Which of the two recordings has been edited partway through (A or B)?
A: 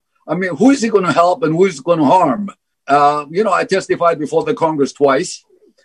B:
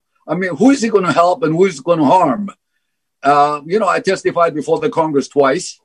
A